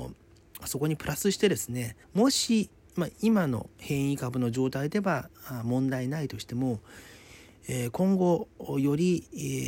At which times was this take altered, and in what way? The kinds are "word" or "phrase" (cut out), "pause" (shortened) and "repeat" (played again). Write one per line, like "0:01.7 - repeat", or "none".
0:02.0 - pause